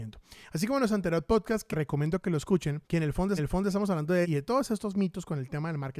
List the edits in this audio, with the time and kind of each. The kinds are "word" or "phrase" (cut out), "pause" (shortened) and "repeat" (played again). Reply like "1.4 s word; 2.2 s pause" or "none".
1.7 s word; 2.8 s pause; 3.4 s repeat; 4.2 s phrase